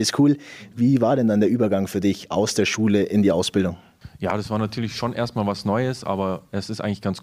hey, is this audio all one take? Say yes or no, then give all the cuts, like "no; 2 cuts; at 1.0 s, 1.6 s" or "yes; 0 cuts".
yes; 0 cuts